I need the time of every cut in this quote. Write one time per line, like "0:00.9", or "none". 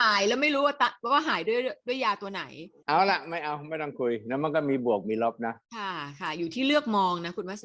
0:05.6